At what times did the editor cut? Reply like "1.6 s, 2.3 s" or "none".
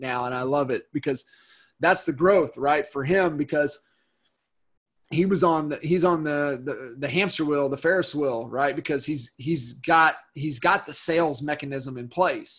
none